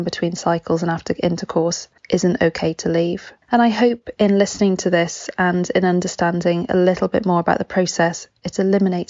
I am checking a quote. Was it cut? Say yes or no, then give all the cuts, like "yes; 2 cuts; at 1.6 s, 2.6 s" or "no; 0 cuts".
yes; 2 cuts; at 2.0 s, 3.4 s